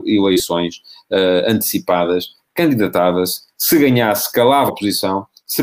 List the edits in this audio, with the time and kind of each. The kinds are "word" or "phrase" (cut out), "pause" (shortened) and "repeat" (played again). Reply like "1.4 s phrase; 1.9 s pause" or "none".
4.7 s word